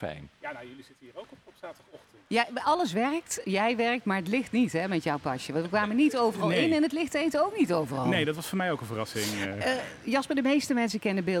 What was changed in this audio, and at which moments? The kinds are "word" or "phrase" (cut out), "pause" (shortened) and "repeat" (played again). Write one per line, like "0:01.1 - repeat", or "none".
0:01.5 - word